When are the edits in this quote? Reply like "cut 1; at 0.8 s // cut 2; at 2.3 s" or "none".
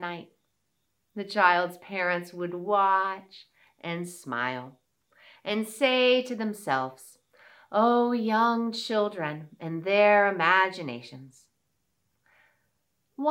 none

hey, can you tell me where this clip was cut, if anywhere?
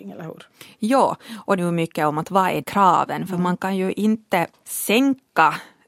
cut 1; at 1.6 s // cut 2; at 2.6 s

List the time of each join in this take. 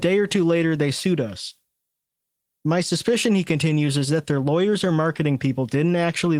none

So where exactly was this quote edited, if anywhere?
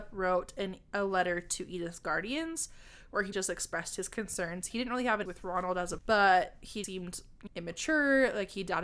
cut 1; at 3.3 s // cut 2; at 4.7 s // cut 3; at 5.3 s // cut 4; at 6.0 s // cut 5; at 6.8 s // cut 6; at 7.5 s

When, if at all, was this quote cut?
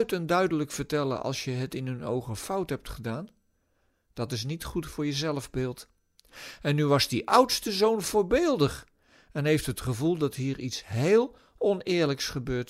none

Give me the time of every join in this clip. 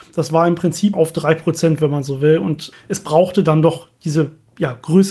cut 1; at 0.9 s // cut 2; at 2.7 s

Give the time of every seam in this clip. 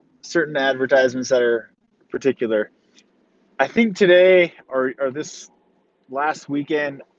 none

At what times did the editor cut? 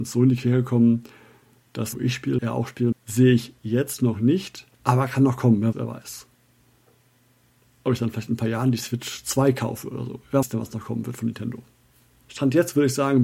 cut 1; at 1.9 s // cut 2; at 2.4 s // cut 3; at 2.9 s // cut 4; at 4.7 s // cut 5; at 5.7 s // cut 6; at 10.4 s

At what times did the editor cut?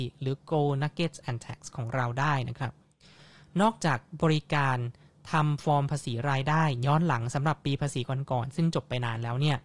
cut 1; at 1.2 s

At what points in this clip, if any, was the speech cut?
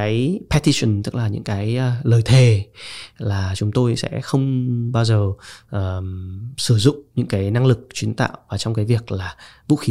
cut 1; at 7.1 s

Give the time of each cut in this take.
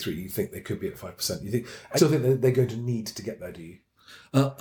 cut 1; at 2.0 s

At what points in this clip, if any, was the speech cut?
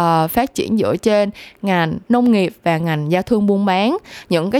cut 1; at 2.0 s

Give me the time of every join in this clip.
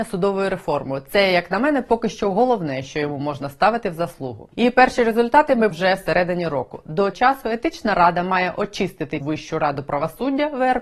cut 1; at 4.5 s // cut 2; at 5.7 s // cut 3; at 7.1 s // cut 4; at 9.2 s

